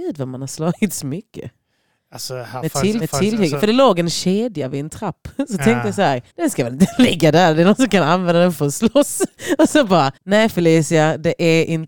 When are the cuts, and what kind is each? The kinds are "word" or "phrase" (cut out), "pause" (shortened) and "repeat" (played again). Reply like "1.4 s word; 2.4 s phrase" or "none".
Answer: 3.0 s repeat; 6.3 s pause; 10.2 s pause